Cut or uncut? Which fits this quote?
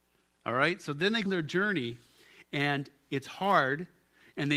cut